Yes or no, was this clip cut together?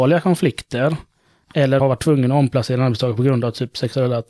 yes